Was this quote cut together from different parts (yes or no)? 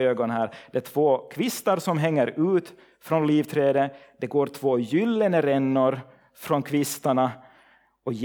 no